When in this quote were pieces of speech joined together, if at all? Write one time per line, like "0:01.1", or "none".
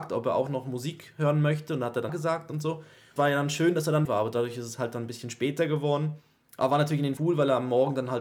0:02.1
0:03.2
0:04.0
0:07.2